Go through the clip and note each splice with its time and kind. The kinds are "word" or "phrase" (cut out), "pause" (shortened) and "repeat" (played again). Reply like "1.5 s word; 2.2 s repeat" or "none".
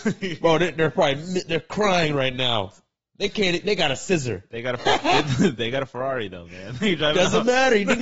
none